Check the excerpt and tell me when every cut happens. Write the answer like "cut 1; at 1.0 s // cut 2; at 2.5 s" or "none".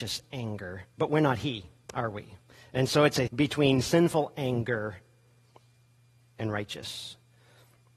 cut 1; at 1.9 s // cut 2; at 3.3 s